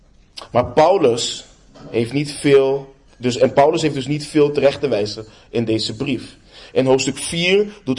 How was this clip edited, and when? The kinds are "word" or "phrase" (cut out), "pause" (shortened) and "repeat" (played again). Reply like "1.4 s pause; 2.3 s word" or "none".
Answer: none